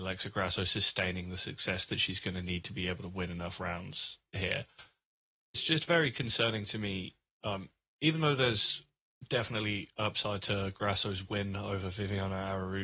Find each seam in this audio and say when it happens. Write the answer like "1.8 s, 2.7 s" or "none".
none